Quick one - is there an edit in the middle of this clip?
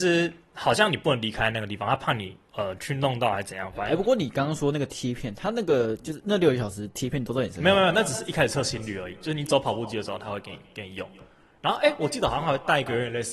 no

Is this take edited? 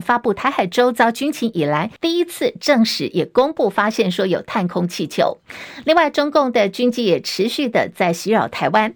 yes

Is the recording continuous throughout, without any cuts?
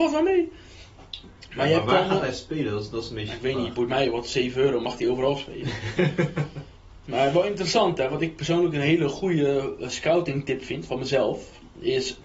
yes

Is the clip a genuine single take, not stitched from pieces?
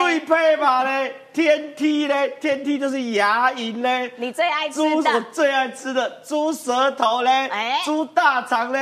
yes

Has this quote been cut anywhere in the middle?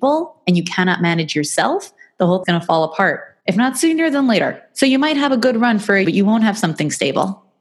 yes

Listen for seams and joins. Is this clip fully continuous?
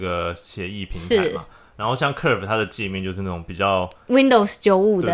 yes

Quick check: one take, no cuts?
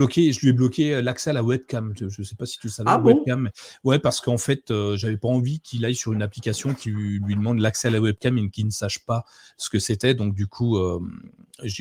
yes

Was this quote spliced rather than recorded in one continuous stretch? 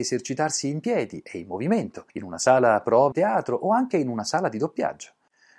yes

